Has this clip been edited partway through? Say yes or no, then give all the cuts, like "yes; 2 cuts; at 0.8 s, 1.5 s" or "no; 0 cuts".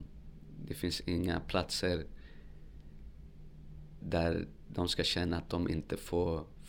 yes; 1 cut; at 4.0 s